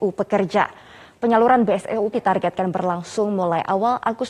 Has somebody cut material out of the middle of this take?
yes; 1 cut; at 2.1 s

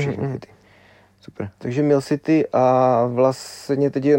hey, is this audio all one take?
yes; 0 cuts

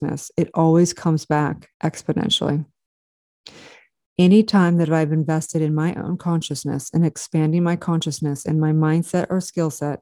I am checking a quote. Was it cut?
yes; 1 cut; at 1.7 s

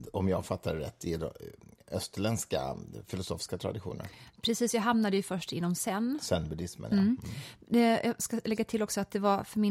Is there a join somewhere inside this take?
no; 0 cuts

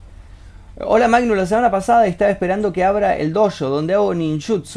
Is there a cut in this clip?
no; 0 cuts

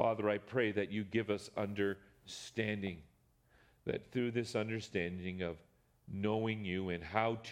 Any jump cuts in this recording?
no; 0 cuts

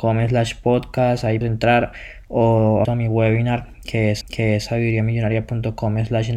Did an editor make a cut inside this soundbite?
yes; 3 cuts; at 1.4 s, 2.8 s, 4.2 s

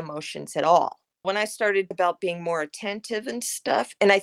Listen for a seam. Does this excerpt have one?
yes; 2 cuts; at 1.2 s, 1.9 s

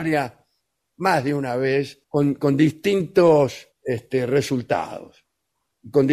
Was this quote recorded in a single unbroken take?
no; 2 cuts; at 2.0 s, 3.7 s

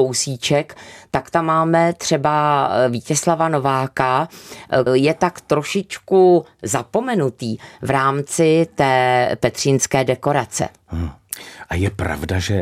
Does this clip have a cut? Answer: yes; 1 cut; at 4.9 s

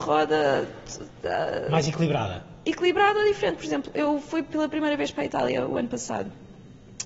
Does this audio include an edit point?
no; 0 cuts

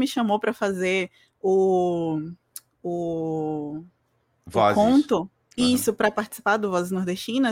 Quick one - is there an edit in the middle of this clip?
no; 0 cuts

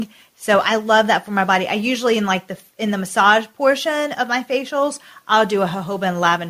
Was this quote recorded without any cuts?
yes; 0 cuts

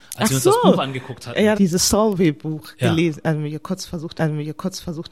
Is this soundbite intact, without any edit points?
no; 2 cuts; at 1.5 s, 4.2 s

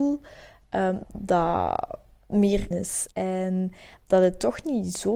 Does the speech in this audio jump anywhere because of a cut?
yes; 3 cuts; at 1.0 s, 2.7 s, 3.1 s

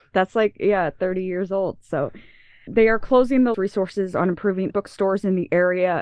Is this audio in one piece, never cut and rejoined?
no; 3 cuts; at 2.7 s, 3.5 s, 4.7 s

